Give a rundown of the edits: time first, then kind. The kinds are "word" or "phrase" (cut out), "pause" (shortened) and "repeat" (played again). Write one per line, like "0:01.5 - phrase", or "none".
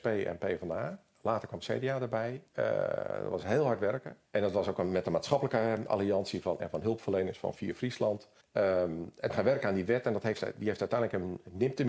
0:02.5 - pause
0:04.3 - pause
0:06.6 - word
0:08.4 - pause
0:09.3 - word